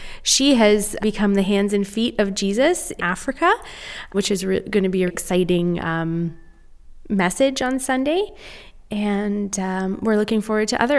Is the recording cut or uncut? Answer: cut